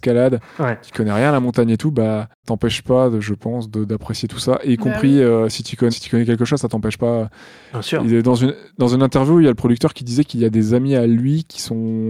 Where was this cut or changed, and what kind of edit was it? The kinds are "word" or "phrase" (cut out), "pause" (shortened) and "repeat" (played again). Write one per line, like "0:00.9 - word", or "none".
0:02.4 - word
0:05.9 - word